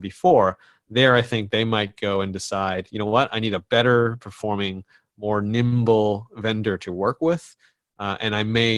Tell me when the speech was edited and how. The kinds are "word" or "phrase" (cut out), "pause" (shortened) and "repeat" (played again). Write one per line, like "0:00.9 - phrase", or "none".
none